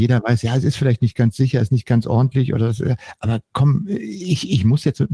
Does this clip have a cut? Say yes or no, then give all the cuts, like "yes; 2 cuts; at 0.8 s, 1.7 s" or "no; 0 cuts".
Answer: no; 0 cuts